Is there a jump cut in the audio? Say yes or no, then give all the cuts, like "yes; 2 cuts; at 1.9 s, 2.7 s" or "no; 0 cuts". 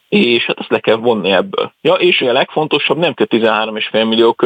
yes; 2 cuts; at 2.2 s, 3.1 s